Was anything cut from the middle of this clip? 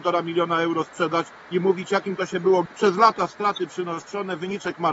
yes; 1 cut; at 2.7 s

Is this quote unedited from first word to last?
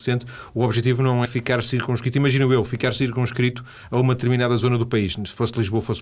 no; 1 cut; at 1.3 s

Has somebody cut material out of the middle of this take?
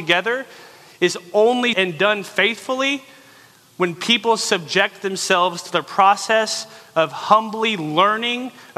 yes; 1 cut; at 1.7 s

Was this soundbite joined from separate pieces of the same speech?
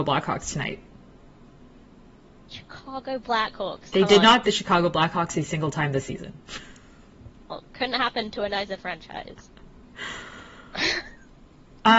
yes; 2 cuts; at 3.9 s, 4.4 s

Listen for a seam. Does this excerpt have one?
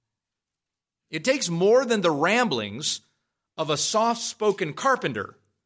no; 0 cuts

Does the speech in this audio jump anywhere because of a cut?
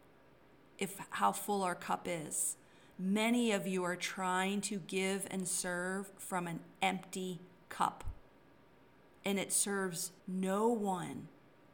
yes; 1 cut; at 10.2 s

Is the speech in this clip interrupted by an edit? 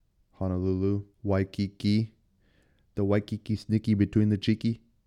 yes; 1 cut; at 1.1 s

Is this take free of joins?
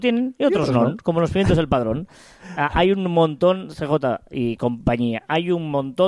yes; 0 cuts

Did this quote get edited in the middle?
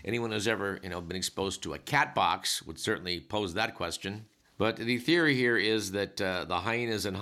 no; 0 cuts

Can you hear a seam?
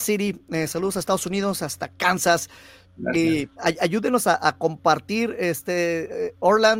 no; 0 cuts

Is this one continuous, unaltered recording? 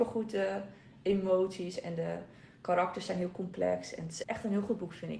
no; 1 cut; at 4.2 s

